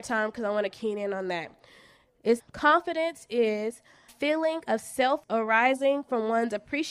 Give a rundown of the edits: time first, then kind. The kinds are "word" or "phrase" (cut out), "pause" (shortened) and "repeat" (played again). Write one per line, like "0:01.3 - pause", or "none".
0:02.4 - word
0:04.1 - word
0:05.2 - word